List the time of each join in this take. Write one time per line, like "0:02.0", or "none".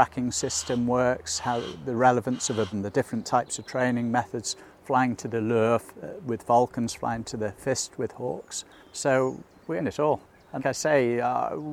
0:02.7
0:08.8
0:09.8
0:10.6